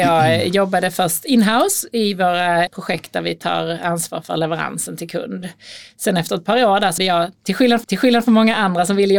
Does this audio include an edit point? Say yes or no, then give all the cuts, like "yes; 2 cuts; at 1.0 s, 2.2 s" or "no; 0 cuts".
yes; 3 cuts; at 2.7 s, 7.0 s, 7.8 s